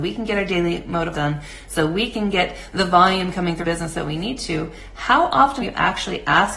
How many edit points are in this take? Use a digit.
3